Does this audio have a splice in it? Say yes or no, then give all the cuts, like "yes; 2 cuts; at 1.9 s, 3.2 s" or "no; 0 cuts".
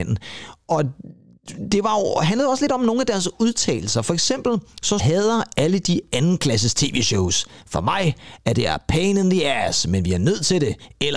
yes; 1 cut; at 5.0 s